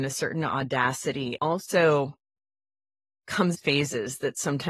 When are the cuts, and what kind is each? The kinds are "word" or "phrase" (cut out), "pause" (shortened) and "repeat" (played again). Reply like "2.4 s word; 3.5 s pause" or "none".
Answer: 1.4 s word; 3.5 s word

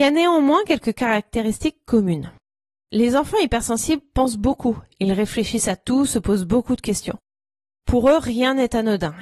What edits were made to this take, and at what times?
none

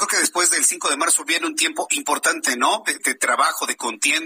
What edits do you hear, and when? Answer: 3.0 s word

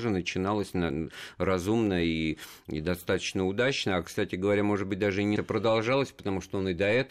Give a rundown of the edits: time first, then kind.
5.4 s word

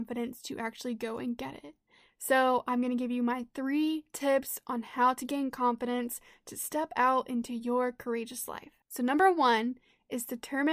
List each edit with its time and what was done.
8.8 s pause

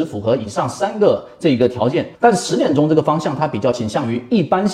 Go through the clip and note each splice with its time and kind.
2.1 s pause

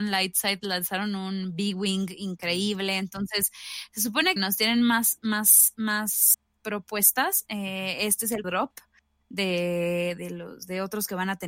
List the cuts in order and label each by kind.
4.4 s word; 8.4 s word; 10.2 s word

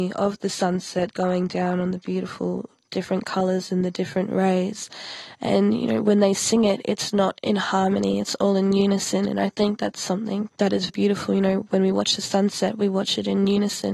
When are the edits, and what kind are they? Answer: 1.5 s phrase; 10.5 s word; 10.9 s word

